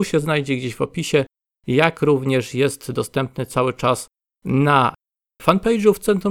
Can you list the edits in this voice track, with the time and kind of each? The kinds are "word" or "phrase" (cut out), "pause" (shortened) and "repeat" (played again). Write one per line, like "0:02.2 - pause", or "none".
none

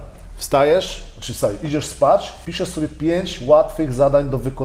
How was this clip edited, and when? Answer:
0:02.4 - word

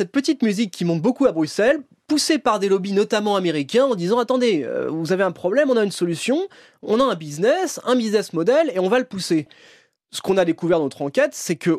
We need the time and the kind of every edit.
none

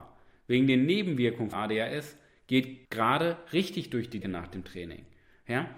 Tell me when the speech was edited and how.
0:01.5 - word
0:02.8 - pause
0:04.2 - word

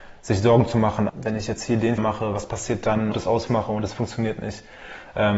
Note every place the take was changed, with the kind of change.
0:01.1 - word
0:02.0 - word
0:03.1 - phrase
0:03.5 - phrase

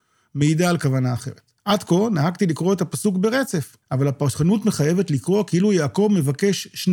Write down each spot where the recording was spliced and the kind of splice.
0:01.6 - pause
0:03.8 - pause

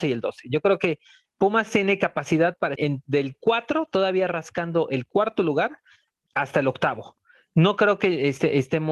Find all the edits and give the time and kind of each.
0:02.8 - word

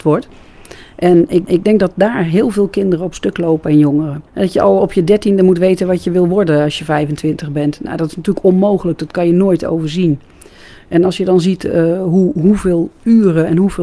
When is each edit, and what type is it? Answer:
0:01.5 - repeat
0:04.3 - pause

